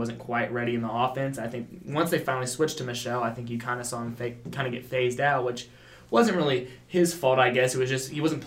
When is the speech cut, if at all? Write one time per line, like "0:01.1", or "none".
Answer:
none